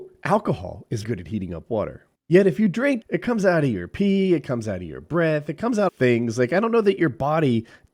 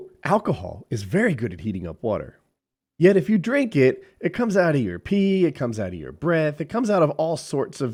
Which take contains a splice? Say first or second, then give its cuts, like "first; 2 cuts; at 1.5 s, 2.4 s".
first; 4 cuts; at 1.0 s, 2.1 s, 3.0 s, 5.9 s